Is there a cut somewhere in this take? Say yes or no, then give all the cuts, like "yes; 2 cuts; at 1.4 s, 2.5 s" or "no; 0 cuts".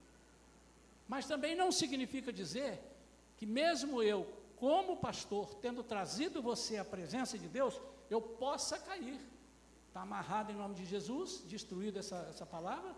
yes; 2 cuts; at 1.0 s, 9.9 s